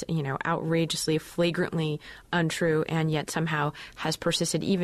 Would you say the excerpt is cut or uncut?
cut